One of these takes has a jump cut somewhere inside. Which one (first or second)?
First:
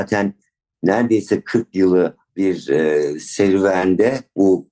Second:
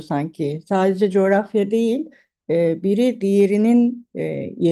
first